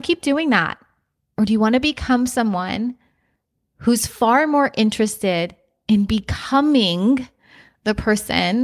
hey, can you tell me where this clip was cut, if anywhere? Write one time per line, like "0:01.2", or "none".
none

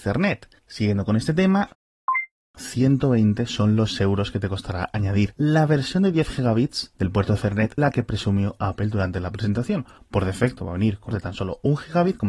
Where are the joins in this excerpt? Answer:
0:07.8
0:11.1

